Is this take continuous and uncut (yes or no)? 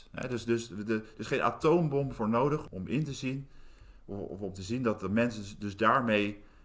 yes